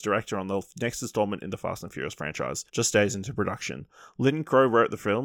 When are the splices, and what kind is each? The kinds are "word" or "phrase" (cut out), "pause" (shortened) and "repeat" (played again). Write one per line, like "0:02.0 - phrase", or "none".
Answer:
0:02.7 - pause